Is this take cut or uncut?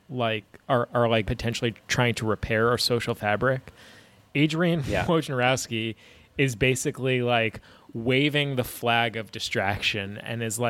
cut